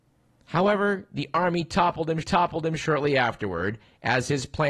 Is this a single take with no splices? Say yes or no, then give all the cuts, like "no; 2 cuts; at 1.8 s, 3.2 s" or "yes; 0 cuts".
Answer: no; 1 cut; at 2.2 s